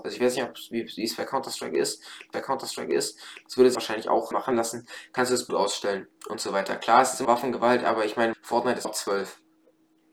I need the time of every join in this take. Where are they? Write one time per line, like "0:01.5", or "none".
0:02.3
0:03.7
0:04.3
0:05.5
0:06.2
0:07.2
0:08.3
0:08.8